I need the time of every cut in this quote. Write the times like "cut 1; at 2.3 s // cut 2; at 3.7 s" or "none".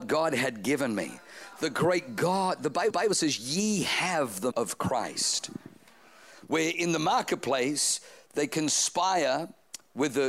cut 1; at 2.9 s // cut 2; at 4.5 s